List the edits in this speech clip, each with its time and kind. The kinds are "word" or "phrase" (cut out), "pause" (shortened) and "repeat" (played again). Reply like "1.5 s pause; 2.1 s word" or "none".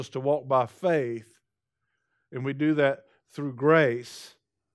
none